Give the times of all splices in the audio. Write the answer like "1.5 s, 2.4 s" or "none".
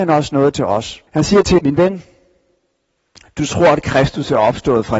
1.1 s, 1.6 s